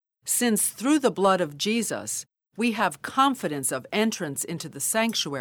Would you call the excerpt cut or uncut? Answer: uncut